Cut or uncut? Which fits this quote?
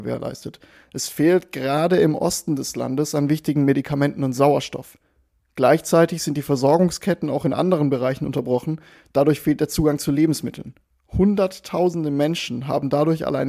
uncut